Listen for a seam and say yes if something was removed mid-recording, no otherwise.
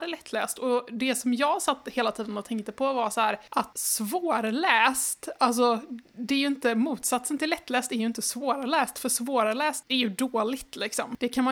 no